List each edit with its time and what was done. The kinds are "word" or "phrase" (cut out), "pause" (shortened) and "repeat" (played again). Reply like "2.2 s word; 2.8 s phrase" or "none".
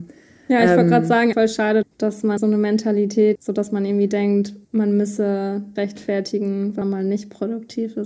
1.3 s word; 1.8 s word; 2.4 s word; 3.4 s word; 4.6 s pause; 5.8 s word; 6.8 s word